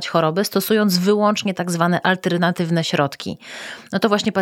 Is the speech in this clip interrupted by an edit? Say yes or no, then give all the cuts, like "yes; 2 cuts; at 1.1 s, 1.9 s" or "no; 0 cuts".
no; 0 cuts